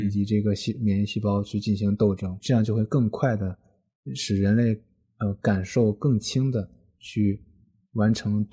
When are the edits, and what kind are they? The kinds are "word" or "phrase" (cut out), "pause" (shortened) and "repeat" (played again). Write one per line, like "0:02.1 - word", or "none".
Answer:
0:02.4 - word